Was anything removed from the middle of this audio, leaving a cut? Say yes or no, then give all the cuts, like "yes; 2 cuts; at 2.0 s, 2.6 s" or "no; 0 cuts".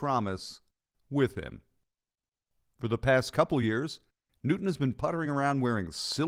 no; 0 cuts